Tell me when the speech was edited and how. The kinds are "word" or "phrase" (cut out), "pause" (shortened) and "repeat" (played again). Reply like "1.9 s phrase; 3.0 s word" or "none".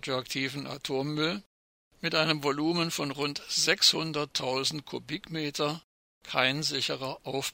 none